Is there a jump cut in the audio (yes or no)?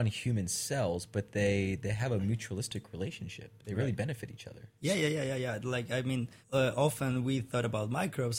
yes